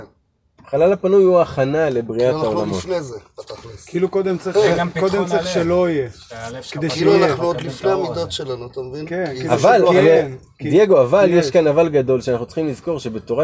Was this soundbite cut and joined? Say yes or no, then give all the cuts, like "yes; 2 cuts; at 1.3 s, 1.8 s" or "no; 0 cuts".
no; 0 cuts